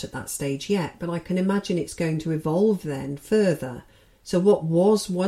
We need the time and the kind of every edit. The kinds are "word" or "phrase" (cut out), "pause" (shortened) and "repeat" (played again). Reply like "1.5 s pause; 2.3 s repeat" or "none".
none